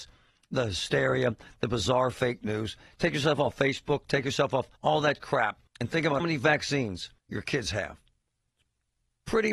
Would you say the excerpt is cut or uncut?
cut